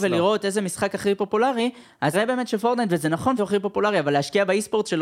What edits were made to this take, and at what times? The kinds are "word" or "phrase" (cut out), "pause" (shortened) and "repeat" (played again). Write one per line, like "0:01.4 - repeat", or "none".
0:02.1 - word
0:03.4 - word